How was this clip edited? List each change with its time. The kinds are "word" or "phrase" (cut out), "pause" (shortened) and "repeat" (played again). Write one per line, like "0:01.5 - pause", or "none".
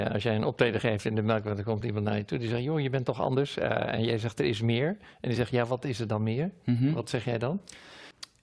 none